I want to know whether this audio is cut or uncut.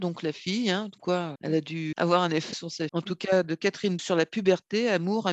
cut